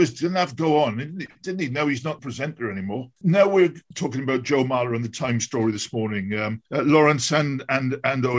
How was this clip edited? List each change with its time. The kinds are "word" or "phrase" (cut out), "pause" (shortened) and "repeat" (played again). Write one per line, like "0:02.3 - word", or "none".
0:02.2 - phrase
0:06.7 - pause

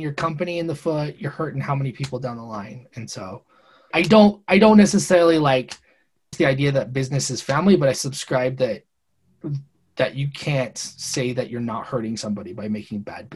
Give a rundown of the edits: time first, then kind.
0:01.2 - word
0:03.9 - word
0:06.3 - word

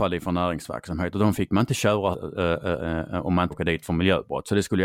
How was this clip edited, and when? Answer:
0:02.1 - phrase
0:03.5 - word

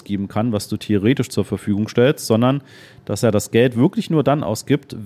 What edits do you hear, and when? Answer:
none

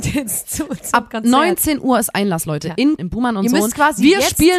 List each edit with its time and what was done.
0:03.0 - word

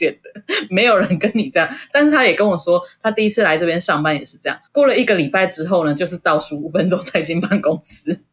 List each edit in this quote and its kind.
0:04.7 - pause

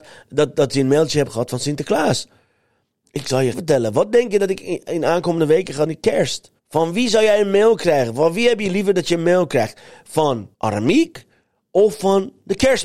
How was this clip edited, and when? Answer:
0:03.5 - word
0:05.9 - phrase
0:06.6 - pause
0:10.5 - pause

